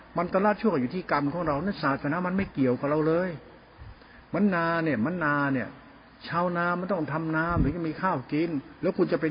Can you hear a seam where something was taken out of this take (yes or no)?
no